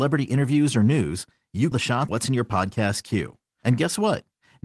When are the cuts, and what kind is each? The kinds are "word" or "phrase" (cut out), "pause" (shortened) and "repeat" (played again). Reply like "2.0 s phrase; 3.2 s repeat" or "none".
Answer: 1.7 s word; 2.1 s word